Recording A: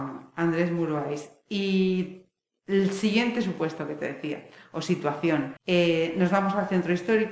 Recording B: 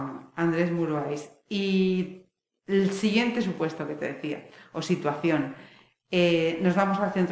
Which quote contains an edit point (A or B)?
A